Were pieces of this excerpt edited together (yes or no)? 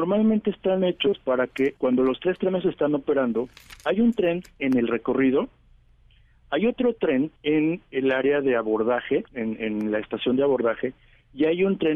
yes